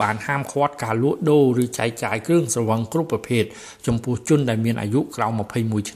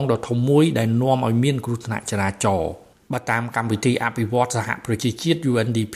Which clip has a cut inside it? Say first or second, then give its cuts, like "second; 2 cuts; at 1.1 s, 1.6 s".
second; 1 cut; at 2.9 s